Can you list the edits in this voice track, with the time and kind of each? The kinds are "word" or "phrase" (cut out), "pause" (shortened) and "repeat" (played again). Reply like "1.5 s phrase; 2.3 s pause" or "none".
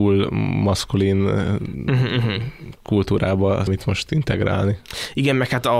3.7 s word